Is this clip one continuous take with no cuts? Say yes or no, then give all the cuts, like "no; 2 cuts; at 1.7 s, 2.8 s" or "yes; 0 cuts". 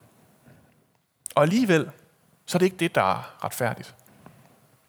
yes; 0 cuts